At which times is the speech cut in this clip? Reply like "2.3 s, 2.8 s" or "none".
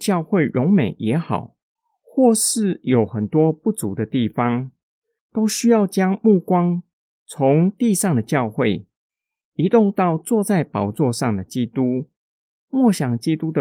none